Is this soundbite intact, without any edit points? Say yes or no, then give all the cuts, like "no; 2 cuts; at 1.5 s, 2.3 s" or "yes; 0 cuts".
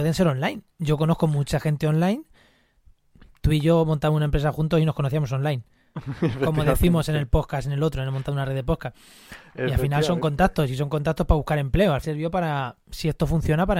no; 1 cut; at 12.0 s